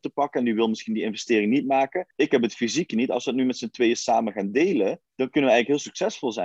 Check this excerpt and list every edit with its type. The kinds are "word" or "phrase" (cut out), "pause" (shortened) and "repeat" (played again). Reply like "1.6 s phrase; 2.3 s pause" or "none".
2.1 s pause; 5.1 s pause